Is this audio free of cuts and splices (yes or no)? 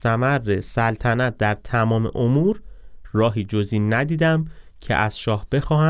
yes